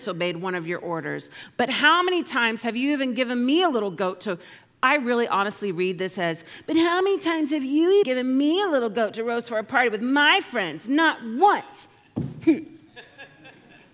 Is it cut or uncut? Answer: cut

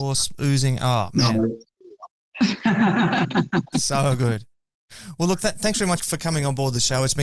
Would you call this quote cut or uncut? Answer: cut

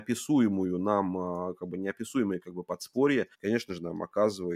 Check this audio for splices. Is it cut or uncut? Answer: cut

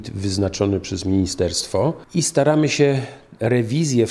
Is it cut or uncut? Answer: uncut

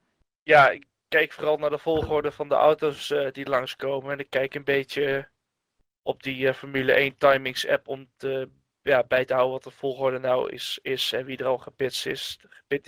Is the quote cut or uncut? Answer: uncut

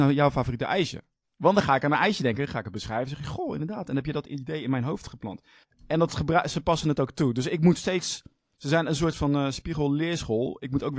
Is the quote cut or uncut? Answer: cut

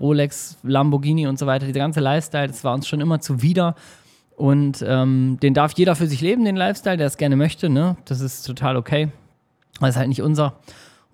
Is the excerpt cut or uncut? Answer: cut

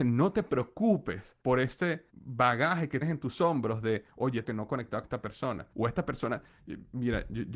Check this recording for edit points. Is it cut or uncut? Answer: cut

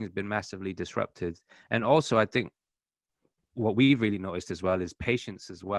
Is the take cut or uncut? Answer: uncut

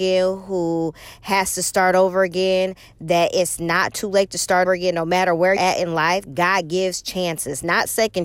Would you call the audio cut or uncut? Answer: cut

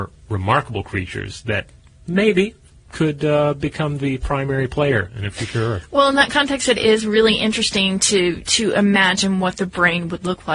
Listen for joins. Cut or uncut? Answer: uncut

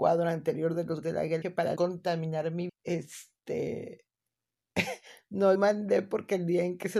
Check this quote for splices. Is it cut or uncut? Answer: cut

